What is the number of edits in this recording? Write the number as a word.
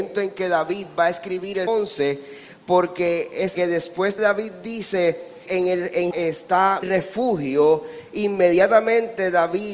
six